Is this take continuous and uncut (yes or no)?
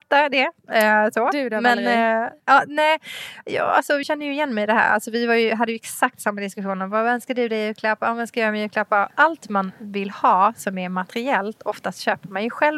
no